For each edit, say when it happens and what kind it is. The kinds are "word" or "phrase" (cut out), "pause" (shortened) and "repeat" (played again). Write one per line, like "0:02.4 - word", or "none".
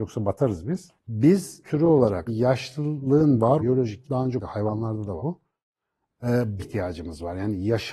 0:01.6 - word
0:02.3 - word
0:03.6 - word
0:04.0 - word
0:04.4 - word
0:05.2 - word
0:06.6 - word